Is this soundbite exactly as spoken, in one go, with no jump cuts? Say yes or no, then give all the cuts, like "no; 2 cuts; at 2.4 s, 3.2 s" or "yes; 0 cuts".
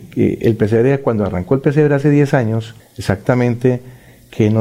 no; 1 cut; at 2.8 s